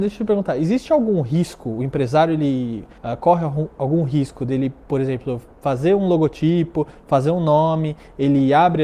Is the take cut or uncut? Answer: cut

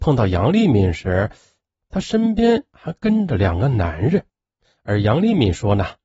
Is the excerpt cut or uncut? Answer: uncut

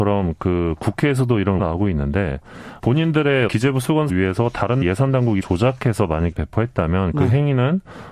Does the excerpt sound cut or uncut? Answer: cut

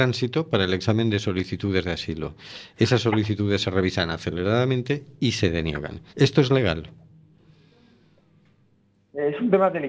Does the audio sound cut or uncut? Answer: cut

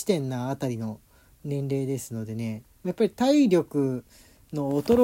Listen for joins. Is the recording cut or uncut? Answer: uncut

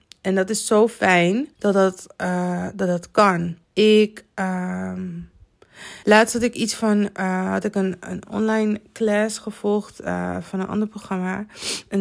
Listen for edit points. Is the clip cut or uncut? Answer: cut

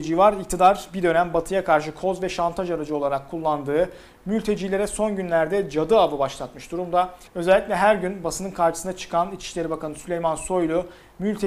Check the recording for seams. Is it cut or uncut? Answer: cut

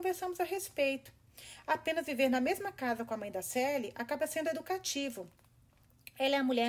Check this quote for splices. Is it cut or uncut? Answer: uncut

